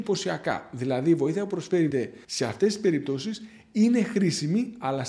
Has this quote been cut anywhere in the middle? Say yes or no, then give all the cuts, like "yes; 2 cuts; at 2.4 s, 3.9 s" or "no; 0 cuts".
yes; 2 cuts; at 1.9 s, 2.2 s